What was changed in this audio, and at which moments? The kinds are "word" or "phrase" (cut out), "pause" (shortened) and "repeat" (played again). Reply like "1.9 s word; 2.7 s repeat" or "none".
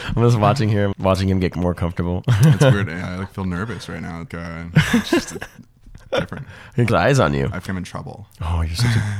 0.9 s word; 4.3 s word; 6.9 s word; 7.7 s word